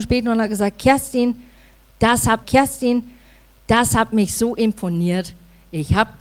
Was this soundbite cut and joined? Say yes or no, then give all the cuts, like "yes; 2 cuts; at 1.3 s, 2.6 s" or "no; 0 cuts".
yes; 1 cut; at 2.4 s